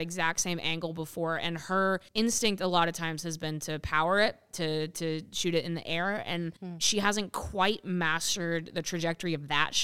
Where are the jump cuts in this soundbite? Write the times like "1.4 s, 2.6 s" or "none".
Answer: 2.1 s, 6.6 s